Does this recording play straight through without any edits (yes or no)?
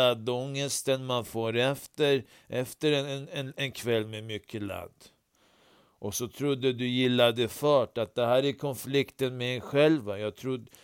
yes